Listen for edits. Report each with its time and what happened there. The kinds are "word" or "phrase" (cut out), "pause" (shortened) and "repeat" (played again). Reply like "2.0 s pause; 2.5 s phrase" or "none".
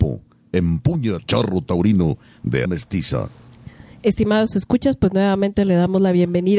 1.2 s word; 2.7 s word